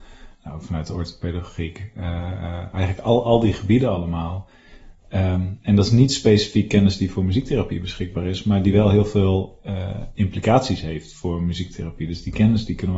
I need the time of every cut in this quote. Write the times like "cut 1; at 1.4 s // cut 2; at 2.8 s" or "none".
none